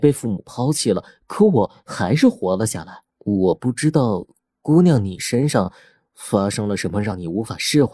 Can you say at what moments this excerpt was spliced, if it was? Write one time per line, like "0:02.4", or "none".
0:03.1